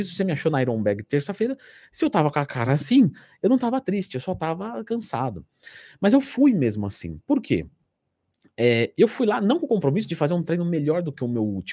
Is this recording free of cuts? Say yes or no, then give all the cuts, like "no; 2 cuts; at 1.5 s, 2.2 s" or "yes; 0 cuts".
yes; 0 cuts